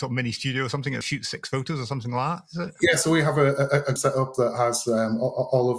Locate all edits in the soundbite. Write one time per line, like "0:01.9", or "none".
0:01.0
0:04.0

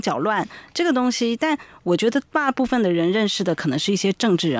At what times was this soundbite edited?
0:02.3

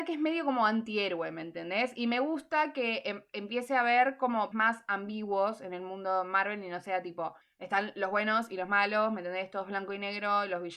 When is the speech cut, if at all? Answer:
0:04.5
0:07.4

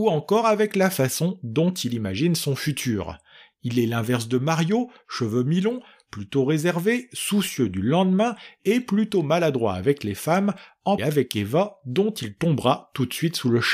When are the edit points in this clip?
0:11.0

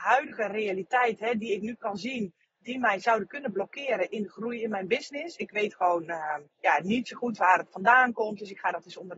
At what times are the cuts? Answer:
0:06.5

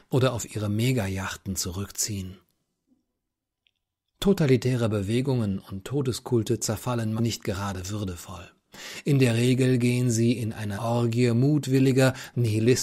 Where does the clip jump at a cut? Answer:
0:07.2
0:10.8

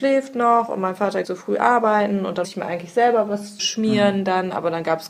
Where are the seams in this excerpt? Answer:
0:01.2
0:02.4
0:03.6

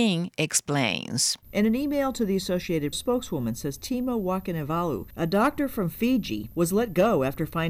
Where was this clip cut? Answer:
0:01.4
0:02.9

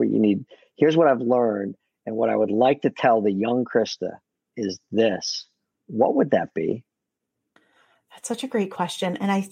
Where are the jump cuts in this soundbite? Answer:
none

